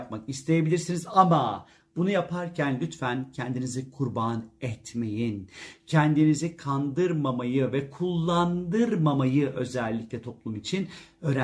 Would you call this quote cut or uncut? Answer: uncut